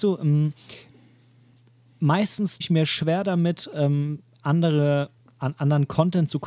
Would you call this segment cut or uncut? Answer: cut